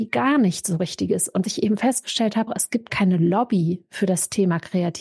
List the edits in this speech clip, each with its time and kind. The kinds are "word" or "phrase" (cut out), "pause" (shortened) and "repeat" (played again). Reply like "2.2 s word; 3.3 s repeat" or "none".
1.4 s word; 2.5 s word; 2.9 s word